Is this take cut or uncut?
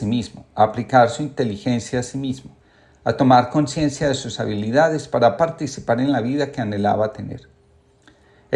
cut